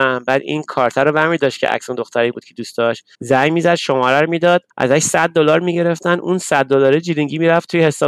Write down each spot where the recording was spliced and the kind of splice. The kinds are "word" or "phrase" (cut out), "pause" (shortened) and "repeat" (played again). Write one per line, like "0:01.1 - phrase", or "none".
0:03.1 - pause
0:04.7 - pause